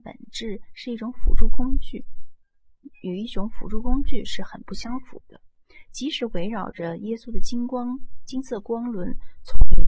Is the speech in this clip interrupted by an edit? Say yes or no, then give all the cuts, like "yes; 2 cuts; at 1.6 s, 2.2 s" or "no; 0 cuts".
yes; 1 cut; at 2.9 s